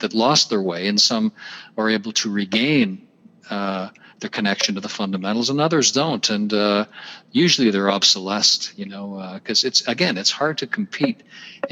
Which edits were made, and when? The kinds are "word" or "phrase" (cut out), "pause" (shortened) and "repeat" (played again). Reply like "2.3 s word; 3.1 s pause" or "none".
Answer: none

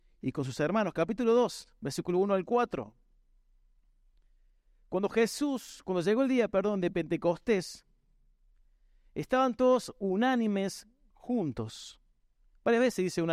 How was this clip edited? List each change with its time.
none

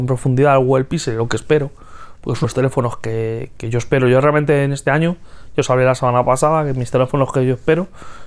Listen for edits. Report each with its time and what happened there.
2.4 s word

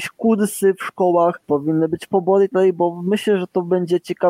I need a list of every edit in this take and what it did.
1.4 s word; 2.5 s word

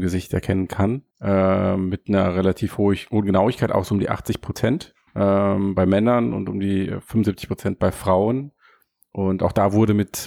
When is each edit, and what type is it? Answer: 1.1 s pause; 5.1 s pause

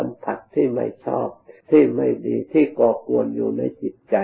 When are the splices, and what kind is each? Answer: 1.6 s pause

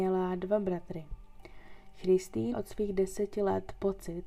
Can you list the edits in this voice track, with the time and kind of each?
2.5 s word

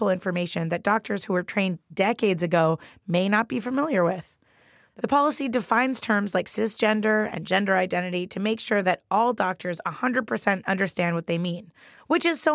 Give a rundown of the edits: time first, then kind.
none

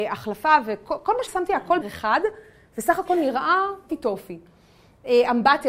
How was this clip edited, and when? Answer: 1.3 s word; 1.8 s word; 3.9 s word

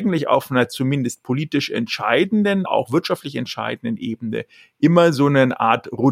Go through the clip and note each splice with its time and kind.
2.6 s word

